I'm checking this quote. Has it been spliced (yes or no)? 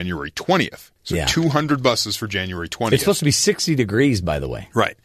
yes